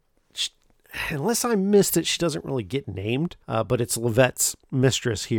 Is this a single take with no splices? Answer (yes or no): no